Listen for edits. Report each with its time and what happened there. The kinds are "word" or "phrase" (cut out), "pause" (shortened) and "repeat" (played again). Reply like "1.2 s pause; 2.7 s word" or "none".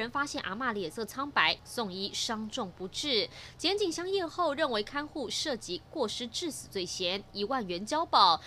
1.6 s phrase